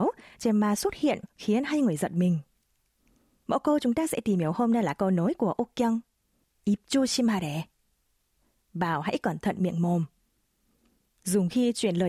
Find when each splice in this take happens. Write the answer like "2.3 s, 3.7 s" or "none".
none